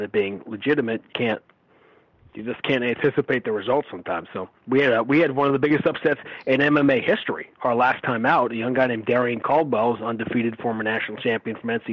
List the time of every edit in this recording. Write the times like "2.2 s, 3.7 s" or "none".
1.1 s